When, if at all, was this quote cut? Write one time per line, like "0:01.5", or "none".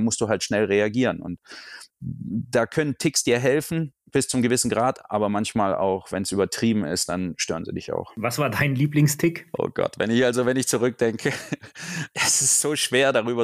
0:01.9
0:04.0